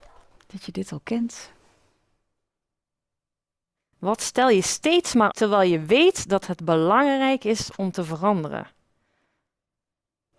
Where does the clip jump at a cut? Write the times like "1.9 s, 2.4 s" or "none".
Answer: 5.3 s

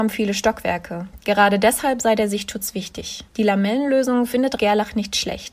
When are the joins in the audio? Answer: 3.3 s, 4.6 s

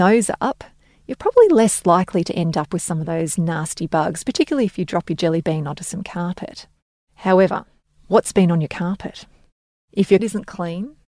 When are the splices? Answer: 10.2 s

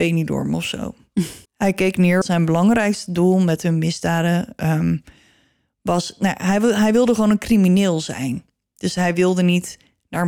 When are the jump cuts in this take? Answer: 1.5 s, 2.2 s

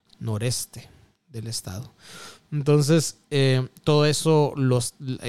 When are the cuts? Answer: none

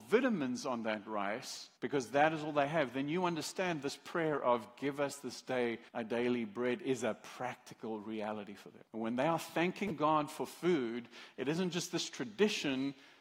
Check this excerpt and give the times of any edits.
1.8 s, 5.9 s, 8.9 s

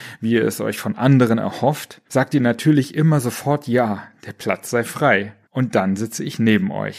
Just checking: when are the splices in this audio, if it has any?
2.1 s, 5.4 s

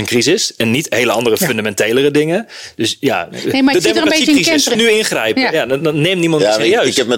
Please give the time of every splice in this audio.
4.7 s

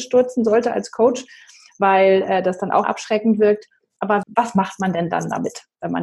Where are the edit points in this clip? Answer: 2.8 s, 4.2 s

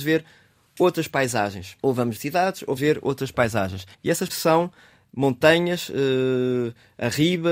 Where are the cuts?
1.8 s, 2.2 s, 2.8 s, 3.9 s, 4.3 s

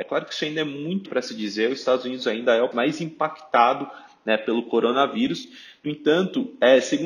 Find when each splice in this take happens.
1.1 s, 2.7 s

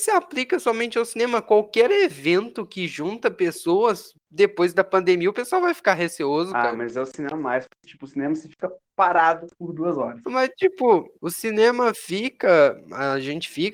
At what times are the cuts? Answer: none

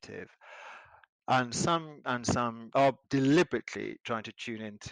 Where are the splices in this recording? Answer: 2.0 s, 2.7 s, 3.0 s

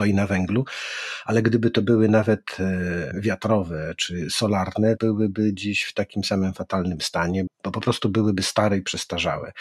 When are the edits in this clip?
3.1 s, 5.0 s, 7.5 s

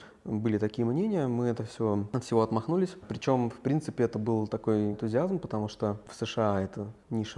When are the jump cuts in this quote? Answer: 4.9 s

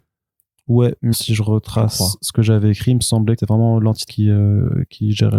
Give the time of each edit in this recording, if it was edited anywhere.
1.1 s, 3.4 s, 4.1 s

